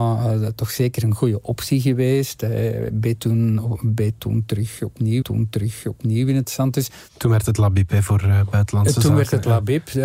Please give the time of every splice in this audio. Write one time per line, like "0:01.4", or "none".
0:05.2